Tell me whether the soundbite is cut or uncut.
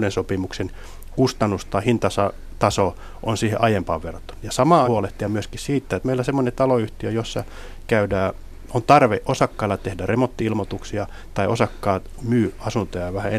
cut